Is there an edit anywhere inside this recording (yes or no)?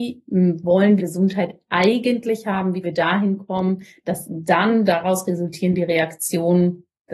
yes